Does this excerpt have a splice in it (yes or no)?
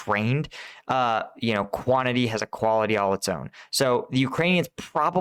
no